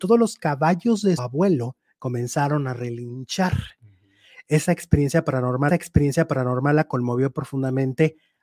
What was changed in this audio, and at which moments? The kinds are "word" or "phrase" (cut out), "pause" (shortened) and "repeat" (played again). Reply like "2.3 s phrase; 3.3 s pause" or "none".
1.2 s word; 5.7 s repeat